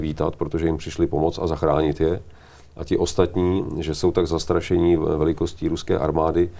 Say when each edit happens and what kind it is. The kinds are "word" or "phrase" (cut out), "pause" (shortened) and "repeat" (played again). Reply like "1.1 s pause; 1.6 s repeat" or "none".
none